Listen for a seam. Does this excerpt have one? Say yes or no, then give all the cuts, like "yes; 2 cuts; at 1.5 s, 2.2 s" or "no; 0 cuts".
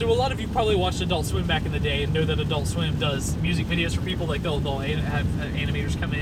no; 0 cuts